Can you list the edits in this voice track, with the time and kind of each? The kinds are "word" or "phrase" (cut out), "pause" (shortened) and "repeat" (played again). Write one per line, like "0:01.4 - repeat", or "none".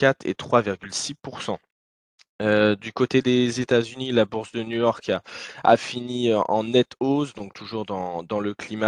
none